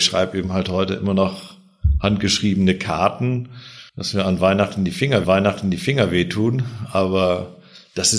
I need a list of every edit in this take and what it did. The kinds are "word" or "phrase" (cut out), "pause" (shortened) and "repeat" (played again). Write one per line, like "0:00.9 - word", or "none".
0:03.9 - pause
0:05.2 - repeat

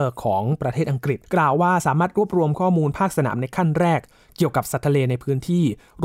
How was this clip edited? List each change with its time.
0:01.2 - pause

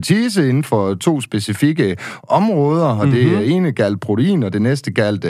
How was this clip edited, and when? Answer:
none

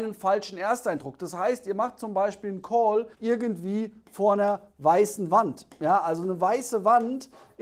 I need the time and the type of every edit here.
0:03.1 - pause

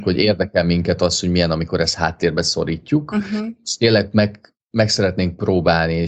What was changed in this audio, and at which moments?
0:04.6 - pause

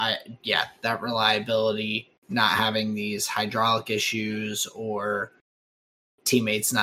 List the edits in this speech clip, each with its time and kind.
none

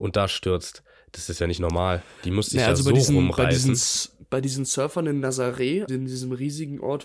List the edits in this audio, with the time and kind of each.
0:05.9 - word

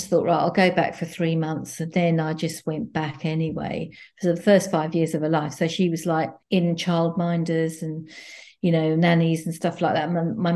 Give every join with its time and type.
0:06.4 - pause

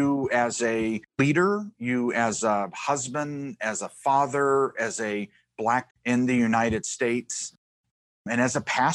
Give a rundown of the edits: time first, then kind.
0:01.1 - pause
0:05.9 - word

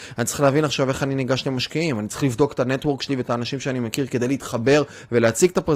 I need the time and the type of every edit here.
none

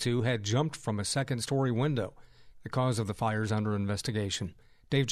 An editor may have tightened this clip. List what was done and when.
none

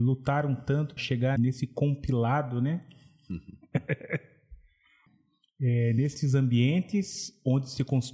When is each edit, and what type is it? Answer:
0:01.0 - word
0:01.4 - word

